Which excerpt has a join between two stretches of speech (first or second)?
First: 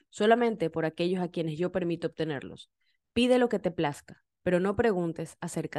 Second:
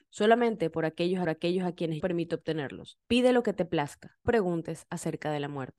second